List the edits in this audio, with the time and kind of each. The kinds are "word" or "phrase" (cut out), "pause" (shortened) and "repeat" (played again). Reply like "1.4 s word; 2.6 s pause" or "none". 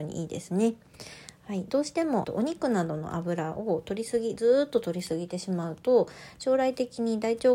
2.2 s phrase